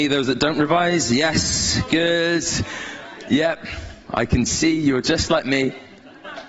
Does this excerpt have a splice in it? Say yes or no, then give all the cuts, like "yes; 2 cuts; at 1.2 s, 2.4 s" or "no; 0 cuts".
no; 0 cuts